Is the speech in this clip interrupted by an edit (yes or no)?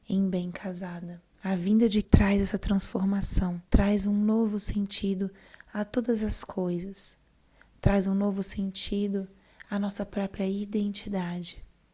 yes